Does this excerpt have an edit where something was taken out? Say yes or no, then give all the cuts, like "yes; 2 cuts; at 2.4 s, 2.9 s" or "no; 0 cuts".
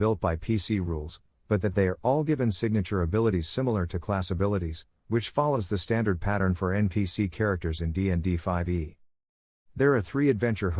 no; 0 cuts